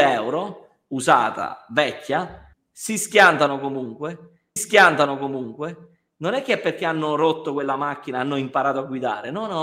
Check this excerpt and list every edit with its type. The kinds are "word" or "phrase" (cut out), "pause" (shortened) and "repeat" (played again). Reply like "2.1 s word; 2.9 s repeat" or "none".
2.5 s pause; 4.6 s repeat